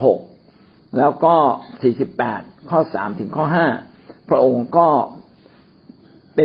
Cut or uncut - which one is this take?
uncut